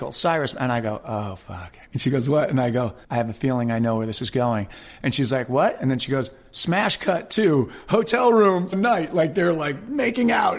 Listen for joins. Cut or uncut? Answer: cut